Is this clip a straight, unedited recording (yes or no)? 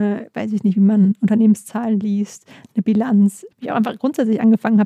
no